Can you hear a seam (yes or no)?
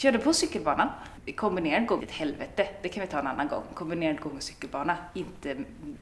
yes